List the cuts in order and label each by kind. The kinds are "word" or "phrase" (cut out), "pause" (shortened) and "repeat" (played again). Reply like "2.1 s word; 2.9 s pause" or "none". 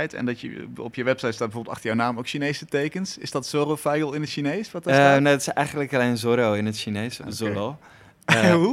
7.2 s word